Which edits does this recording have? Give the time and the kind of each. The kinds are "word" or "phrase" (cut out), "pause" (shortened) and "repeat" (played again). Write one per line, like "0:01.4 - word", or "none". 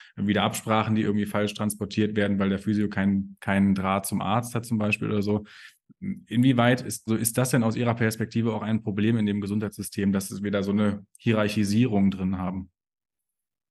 0:07.1 - word